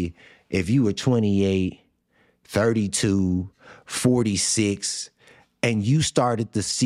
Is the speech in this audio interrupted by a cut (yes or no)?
no